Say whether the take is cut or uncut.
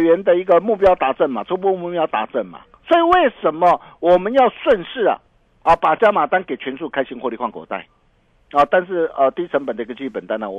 cut